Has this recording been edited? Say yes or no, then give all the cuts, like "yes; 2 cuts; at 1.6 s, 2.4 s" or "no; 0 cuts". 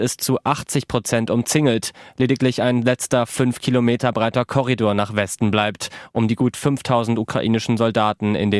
no; 0 cuts